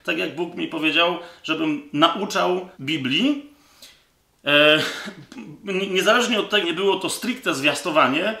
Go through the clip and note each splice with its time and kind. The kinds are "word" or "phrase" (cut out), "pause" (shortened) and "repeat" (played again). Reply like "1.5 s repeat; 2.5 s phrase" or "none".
2.7 s pause; 6.6 s word